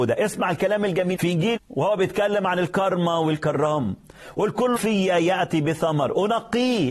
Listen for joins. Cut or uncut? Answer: cut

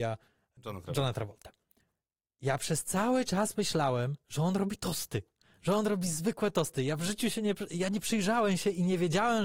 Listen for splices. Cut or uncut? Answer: uncut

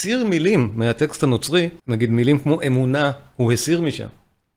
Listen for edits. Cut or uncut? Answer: cut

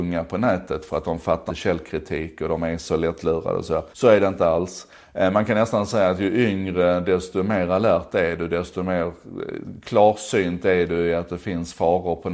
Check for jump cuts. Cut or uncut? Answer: cut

